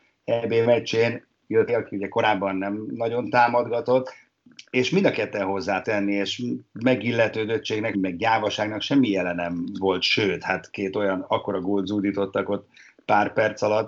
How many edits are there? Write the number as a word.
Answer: three